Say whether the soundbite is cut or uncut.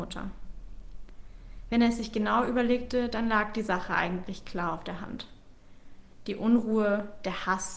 uncut